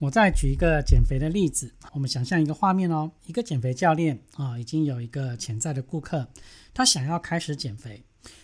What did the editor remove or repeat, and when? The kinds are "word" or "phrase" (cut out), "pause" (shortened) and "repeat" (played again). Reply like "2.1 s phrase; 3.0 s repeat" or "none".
1.9 s word; 3.2 s word